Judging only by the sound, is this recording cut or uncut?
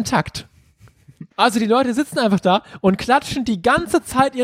cut